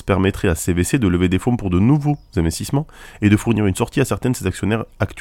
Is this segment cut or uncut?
uncut